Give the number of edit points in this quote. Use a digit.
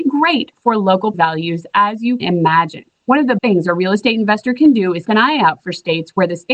4